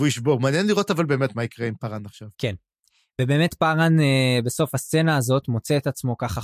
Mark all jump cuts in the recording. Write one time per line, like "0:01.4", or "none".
0:02.3